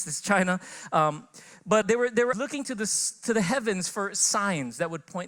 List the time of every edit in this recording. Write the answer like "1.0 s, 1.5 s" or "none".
1.8 s, 2.3 s